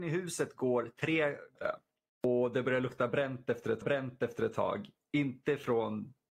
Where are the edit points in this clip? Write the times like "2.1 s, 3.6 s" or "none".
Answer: 1.6 s, 3.8 s